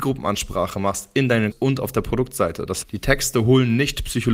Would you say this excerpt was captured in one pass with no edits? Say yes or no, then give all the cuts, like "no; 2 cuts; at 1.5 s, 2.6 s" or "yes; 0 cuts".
no; 2 cuts; at 1.5 s, 2.8 s